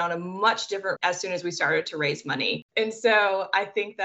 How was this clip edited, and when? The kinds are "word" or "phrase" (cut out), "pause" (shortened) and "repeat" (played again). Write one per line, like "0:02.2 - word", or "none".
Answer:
0:01.0 - word
0:02.7 - pause